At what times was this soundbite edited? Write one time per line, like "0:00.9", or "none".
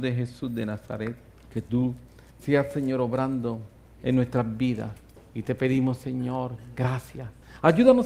none

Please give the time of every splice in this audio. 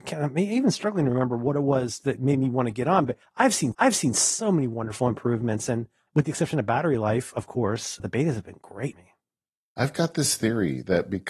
0:03.7
0:06.1
0:08.0
0:08.9

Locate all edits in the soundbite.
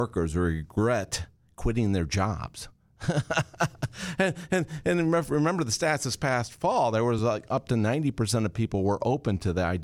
none

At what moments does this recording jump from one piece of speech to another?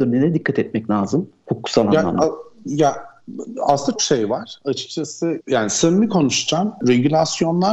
0:04.0
0:05.4

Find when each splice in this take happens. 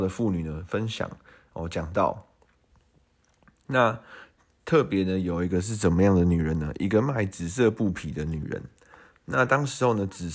none

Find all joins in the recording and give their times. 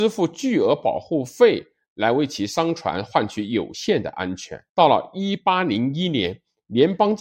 0:04.7

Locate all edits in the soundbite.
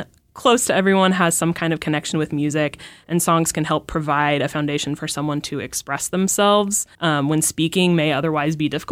0:06.9

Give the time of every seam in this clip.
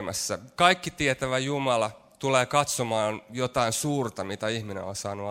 none

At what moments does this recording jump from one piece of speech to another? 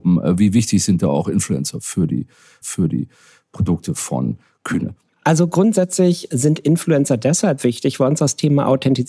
0:02.6
0:05.0
0:06.3

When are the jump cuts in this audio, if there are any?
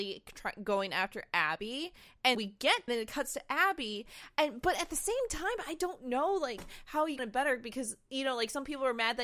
0:02.3
0:02.9
0:07.2

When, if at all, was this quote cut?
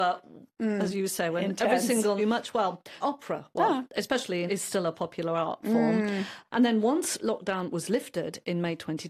0:02.2
0:03.0
0:04.5

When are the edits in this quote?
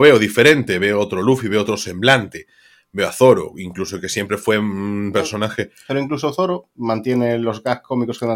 none

